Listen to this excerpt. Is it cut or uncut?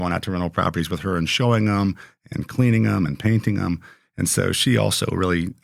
uncut